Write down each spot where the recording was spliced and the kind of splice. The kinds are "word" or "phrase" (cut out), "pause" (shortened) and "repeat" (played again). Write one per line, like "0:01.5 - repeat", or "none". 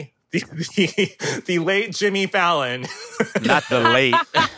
none